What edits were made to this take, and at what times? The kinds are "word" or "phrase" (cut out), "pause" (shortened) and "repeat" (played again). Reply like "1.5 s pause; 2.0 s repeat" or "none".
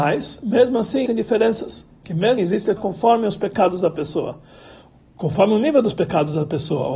1.1 s word; 2.4 s word; 2.8 s word